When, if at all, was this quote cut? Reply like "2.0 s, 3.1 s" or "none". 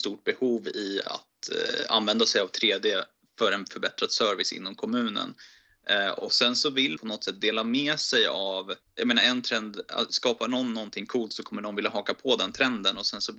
1.0 s, 7.0 s, 8.8 s